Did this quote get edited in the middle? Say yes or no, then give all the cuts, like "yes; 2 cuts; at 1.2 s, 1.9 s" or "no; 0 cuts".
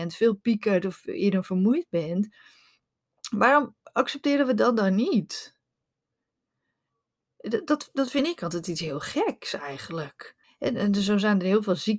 yes; 2 cuts; at 3.8 s, 10.4 s